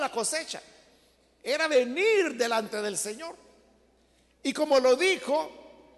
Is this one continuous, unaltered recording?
yes; 0 cuts

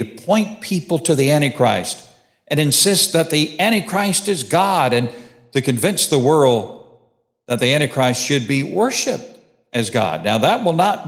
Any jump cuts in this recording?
no; 0 cuts

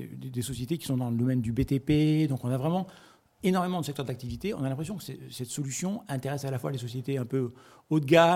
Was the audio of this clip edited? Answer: no; 0 cuts

